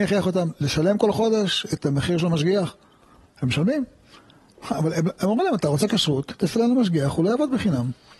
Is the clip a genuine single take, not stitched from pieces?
yes; 0 cuts

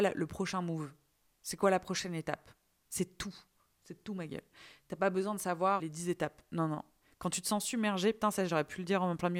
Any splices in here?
yes; 1 cut; at 5.8 s

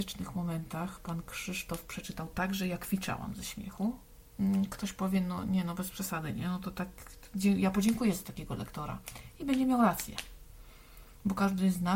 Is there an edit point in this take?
no; 0 cuts

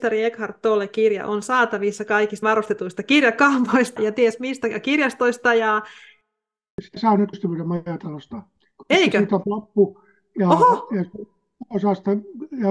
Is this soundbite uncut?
no; 5 cuts; at 2.4 s, 4.0 s, 6.9 s, 7.3 s, 9.4 s

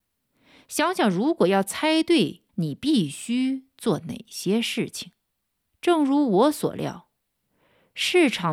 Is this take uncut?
no; 2 cuts; at 2.5 s, 5.5 s

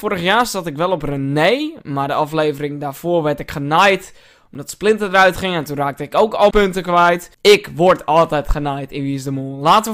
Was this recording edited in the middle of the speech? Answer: yes; 1 cut; at 6.5 s

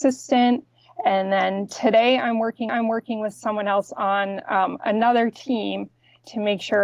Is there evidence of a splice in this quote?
yes; 1 cut; at 2.7 s

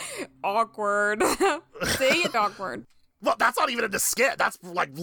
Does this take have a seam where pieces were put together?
yes; 1 cut; at 2.3 s

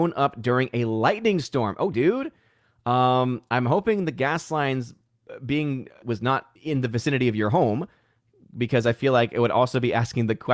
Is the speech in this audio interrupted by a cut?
yes; 3 cuts; at 1.9 s, 6.0 s, 6.6 s

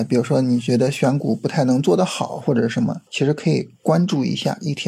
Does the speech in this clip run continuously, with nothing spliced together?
no; 1 cut; at 3.1 s

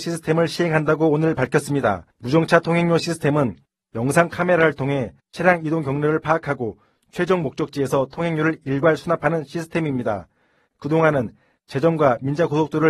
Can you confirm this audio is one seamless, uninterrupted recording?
no; 2 cuts; at 2.1 s, 5.2 s

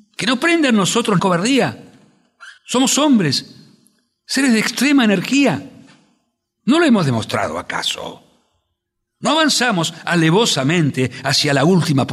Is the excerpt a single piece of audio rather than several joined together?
no; 2 cuts; at 1.2 s, 2.6 s

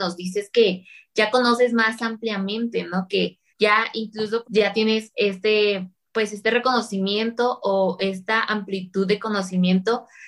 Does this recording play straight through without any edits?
no; 2 cuts; at 3.5 s, 4.4 s

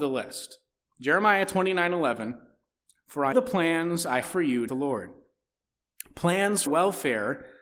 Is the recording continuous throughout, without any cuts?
no; 4 cuts; at 3.3 s, 4.2 s, 4.7 s, 6.7 s

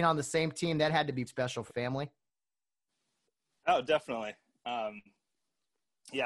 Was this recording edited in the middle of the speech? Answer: yes; 2 cuts; at 1.3 s, 1.7 s

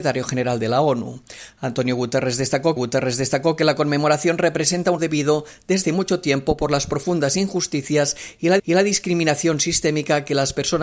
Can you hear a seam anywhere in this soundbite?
yes; 4 cuts; at 2.8 s, 5.0 s, 5.8 s, 8.6 s

